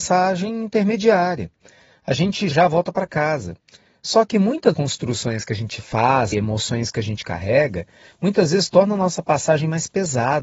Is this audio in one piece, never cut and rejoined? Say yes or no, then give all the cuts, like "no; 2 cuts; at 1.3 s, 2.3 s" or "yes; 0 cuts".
no; 3 cuts; at 2.5 s, 4.7 s, 6.3 s